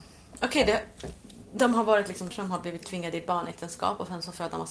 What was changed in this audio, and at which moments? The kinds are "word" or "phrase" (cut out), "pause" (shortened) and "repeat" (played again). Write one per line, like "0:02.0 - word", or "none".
0:02.3 - word